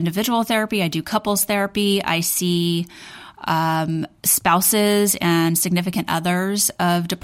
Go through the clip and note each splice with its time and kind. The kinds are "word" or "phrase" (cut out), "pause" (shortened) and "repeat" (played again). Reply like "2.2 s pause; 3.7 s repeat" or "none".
4.2 s pause